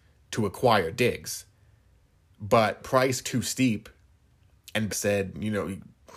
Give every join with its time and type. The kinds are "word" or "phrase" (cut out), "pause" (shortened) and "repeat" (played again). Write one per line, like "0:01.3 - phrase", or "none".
0:02.8 - word
0:03.2 - word
0:04.9 - word